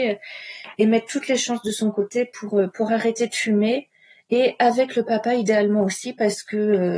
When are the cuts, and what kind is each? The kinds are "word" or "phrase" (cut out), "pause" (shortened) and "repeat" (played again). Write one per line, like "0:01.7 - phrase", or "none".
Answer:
none